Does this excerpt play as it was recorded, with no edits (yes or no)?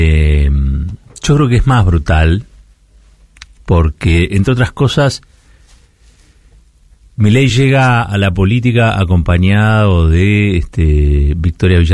yes